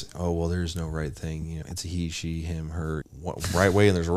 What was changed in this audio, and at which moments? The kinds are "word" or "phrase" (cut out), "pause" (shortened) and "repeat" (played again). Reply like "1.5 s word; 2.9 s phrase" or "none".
1.6 s word; 3.0 s phrase

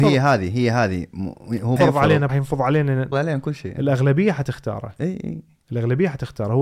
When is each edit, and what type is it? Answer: 1.8 s phrase; 2.3 s phrase; 3.1 s phrase

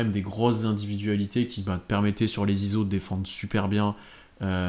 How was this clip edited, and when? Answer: none

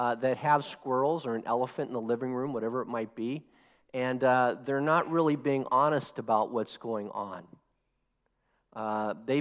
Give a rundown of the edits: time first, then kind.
none

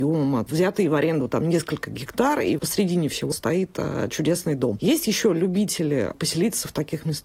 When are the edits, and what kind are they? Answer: 2.6 s word; 3.3 s word

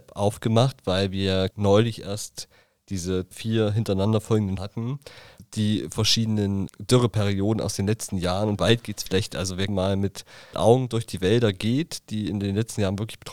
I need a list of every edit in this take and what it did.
1.5 s word; 3.3 s word; 4.6 s word; 5.4 s word; 6.7 s word; 8.6 s word; 9.1 s word; 9.7 s word; 10.5 s word

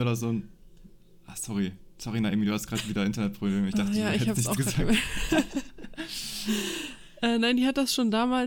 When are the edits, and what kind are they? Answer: none

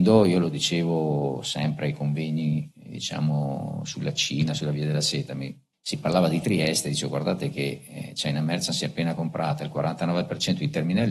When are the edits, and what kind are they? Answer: 5.7 s pause

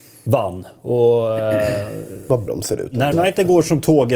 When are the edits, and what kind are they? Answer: 2.5 s word; 3.1 s word

